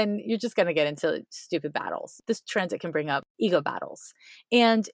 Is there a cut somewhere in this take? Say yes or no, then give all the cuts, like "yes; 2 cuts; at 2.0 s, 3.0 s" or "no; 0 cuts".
no; 0 cuts